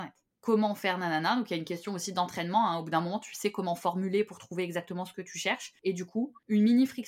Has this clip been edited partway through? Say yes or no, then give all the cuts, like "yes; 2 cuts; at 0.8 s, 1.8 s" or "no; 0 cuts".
no; 0 cuts